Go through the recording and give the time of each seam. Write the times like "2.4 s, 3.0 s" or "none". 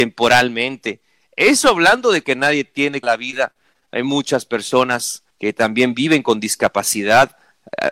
2.2 s, 3.0 s, 5.3 s